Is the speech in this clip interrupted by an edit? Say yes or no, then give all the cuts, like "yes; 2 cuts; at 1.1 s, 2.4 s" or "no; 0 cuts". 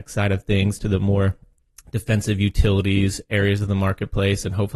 no; 0 cuts